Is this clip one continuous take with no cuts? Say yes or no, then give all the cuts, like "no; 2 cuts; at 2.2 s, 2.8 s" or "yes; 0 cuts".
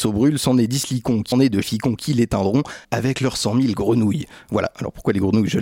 no; 3 cuts; at 1.3 s, 1.6 s, 2.8 s